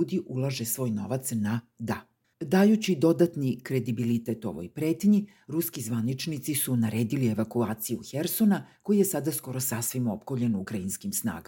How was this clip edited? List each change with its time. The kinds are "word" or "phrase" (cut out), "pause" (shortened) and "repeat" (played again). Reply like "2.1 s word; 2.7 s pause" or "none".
2.2 s pause